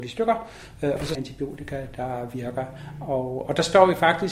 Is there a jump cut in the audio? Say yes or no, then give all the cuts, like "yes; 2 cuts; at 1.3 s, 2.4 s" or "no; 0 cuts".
yes; 1 cut; at 1.1 s